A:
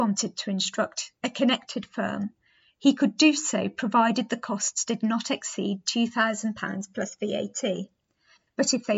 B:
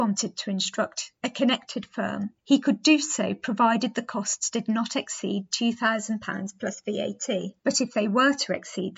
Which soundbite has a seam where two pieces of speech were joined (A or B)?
B